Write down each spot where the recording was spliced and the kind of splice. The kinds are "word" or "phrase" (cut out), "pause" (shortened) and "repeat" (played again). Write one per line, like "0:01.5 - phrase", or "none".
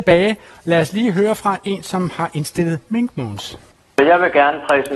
none